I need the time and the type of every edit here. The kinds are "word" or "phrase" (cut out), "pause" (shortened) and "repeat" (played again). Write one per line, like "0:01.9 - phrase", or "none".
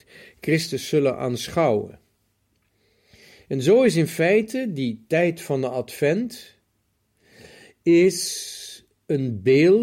none

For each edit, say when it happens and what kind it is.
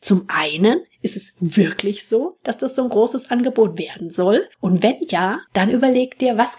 0:04.5 - pause
0:05.5 - pause

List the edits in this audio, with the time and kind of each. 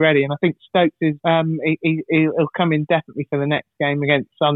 0:01.2 - pause

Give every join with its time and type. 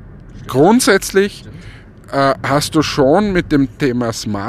none

